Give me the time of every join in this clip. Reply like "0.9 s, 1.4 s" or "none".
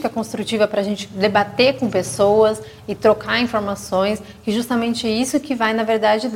none